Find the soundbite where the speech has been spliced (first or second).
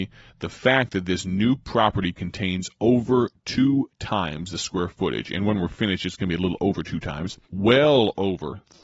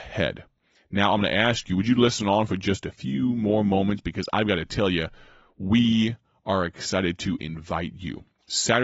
first